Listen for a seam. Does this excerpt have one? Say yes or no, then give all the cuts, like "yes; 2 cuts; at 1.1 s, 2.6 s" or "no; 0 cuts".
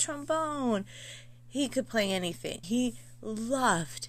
yes; 1 cut; at 2.6 s